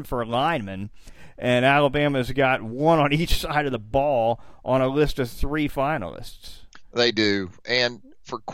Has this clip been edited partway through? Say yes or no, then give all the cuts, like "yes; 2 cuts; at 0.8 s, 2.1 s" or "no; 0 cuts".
no; 0 cuts